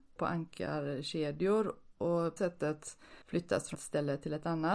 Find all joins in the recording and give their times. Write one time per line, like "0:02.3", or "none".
0:02.4
0:03.2
0:03.7